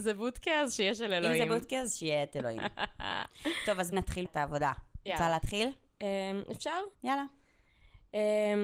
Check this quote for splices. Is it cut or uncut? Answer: cut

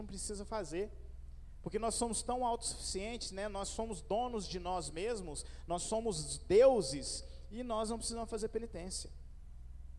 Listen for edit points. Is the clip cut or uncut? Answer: uncut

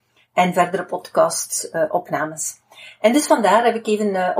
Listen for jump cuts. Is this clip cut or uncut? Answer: uncut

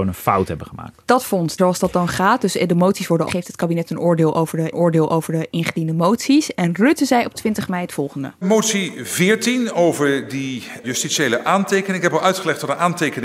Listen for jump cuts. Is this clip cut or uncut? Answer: cut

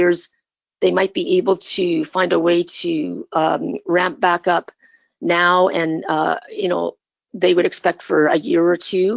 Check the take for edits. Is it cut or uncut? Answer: uncut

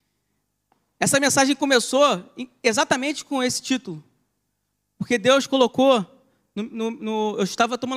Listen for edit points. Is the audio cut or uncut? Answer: uncut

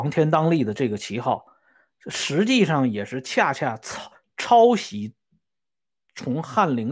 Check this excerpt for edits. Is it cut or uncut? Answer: uncut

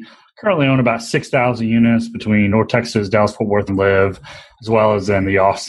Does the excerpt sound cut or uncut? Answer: cut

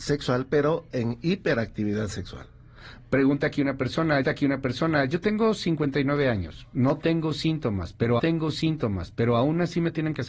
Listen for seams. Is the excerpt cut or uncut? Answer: cut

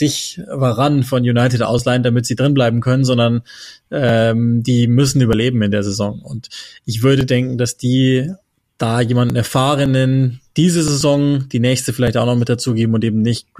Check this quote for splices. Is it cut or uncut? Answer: uncut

